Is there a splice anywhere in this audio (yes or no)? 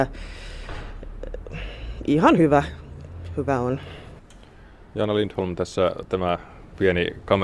no